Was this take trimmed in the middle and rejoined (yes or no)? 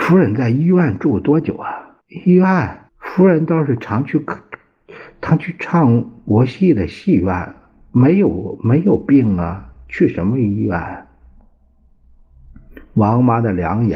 yes